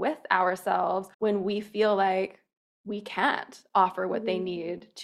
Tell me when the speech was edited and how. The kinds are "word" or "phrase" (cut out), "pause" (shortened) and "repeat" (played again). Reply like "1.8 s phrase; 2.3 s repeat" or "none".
1.1 s pause; 2.6 s pause